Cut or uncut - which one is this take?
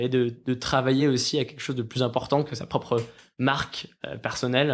uncut